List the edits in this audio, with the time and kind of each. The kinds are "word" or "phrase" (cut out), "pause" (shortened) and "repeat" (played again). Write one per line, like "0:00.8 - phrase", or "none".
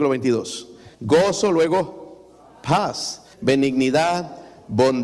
0:00.9 - pause
0:03.3 - word